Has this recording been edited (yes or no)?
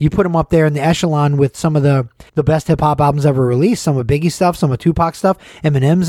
yes